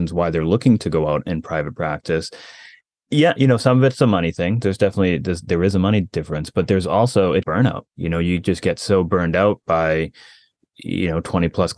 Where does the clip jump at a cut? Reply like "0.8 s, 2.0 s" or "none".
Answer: 7.4 s

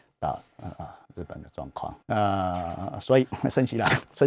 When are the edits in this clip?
1.0 s, 2.0 s

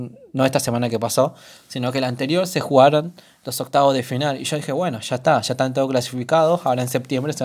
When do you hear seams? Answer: none

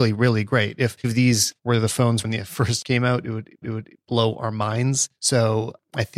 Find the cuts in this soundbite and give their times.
1.0 s, 1.6 s, 2.2 s, 2.8 s, 3.6 s, 5.2 s

